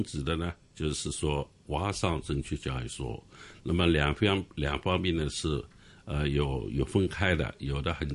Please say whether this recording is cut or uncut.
uncut